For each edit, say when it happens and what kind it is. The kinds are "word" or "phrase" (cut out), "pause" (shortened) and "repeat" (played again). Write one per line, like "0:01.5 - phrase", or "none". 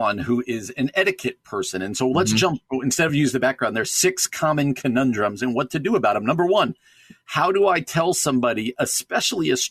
none